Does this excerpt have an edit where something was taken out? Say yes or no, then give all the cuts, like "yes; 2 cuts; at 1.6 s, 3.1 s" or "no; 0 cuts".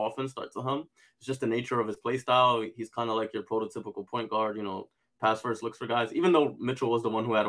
no; 0 cuts